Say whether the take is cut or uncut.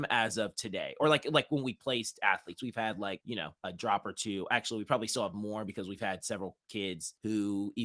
uncut